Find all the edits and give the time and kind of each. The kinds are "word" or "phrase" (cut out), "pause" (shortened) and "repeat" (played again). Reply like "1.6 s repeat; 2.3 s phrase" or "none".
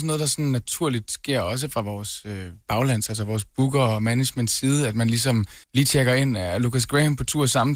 2.6 s pause; 5.6 s pause